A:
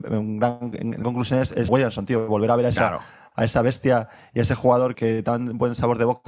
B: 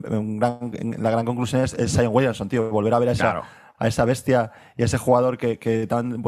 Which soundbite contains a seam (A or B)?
A